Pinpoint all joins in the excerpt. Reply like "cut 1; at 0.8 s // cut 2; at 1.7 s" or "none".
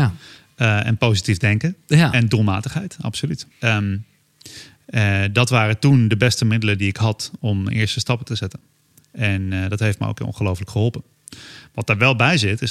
cut 1; at 3.5 s